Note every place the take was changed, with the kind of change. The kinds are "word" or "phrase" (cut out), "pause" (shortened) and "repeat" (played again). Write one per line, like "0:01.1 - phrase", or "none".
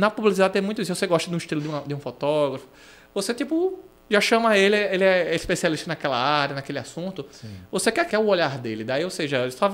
0:08.1 - phrase